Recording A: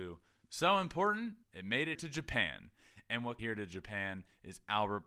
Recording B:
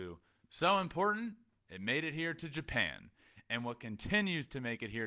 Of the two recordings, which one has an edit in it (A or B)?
A